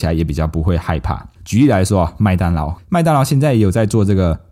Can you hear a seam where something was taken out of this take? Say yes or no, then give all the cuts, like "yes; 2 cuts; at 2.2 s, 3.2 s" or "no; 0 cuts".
yes; 2 cuts; at 1.4 s, 2.8 s